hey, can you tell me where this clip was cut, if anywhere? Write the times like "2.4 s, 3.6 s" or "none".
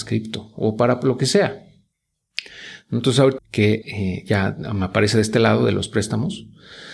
3.4 s, 3.8 s

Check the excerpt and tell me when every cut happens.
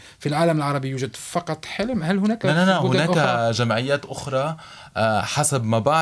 none

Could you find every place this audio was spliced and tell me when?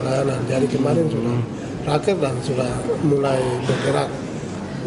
none

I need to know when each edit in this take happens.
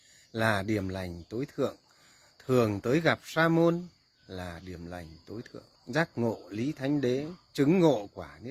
5.8 s

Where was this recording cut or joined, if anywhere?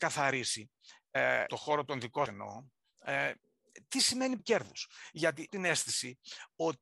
1.5 s, 2.3 s, 4.4 s, 5.5 s

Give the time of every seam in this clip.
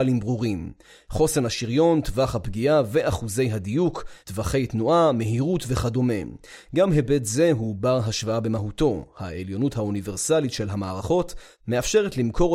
4.2 s

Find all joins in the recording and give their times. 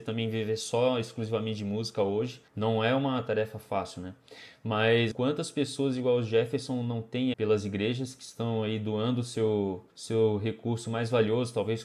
2.5 s, 5.1 s, 7.3 s, 9.9 s

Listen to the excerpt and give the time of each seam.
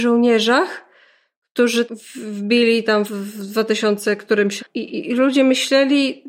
1.9 s, 3.1 s, 4.6 s

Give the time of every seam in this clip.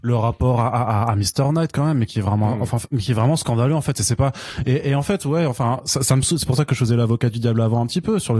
2.1 s

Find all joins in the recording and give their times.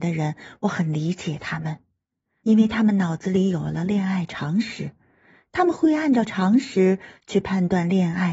none

